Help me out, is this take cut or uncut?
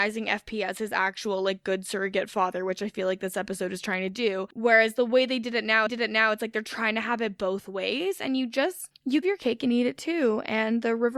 cut